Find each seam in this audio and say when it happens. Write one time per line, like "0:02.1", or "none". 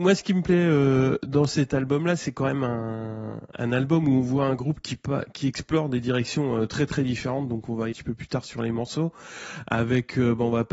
0:03.5
0:07.9